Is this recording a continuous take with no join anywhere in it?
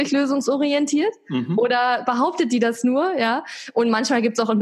yes; 0 cuts

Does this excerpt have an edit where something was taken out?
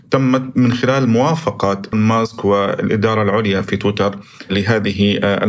yes; 1 cut; at 1.9 s

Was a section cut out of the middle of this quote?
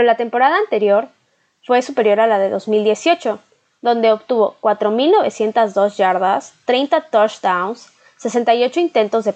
no; 0 cuts

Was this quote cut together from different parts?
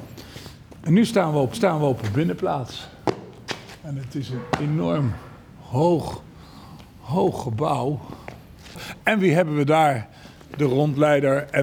yes; 1 cut; at 1.5 s

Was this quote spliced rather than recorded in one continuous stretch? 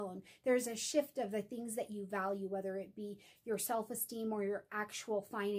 no; 0 cuts

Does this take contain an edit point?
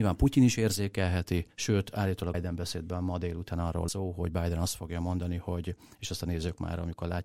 yes; 3 cuts; at 1.5 s, 2.3 s, 3.9 s

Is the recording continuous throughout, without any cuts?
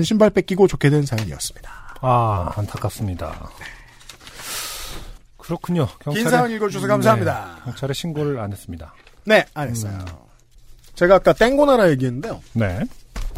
yes; 0 cuts

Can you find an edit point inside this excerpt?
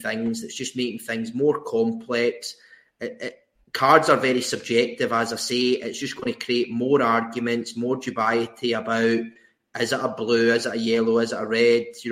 no; 0 cuts

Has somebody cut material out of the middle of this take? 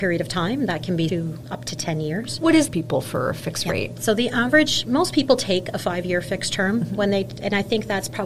yes; 2 cuts; at 1.1 s, 2.7 s

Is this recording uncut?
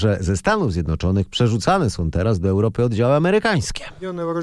yes; 0 cuts

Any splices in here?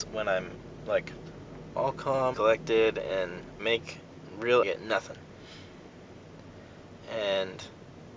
yes; 3 cuts; at 2.3 s, 3.6 s, 4.6 s

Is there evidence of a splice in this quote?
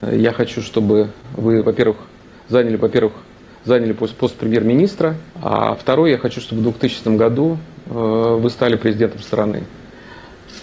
yes; 2 cuts; at 2.8 s, 5.3 s

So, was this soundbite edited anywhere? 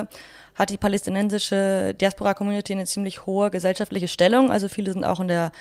no; 0 cuts

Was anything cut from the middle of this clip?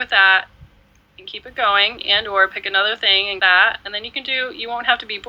yes; 1 cut; at 3.4 s

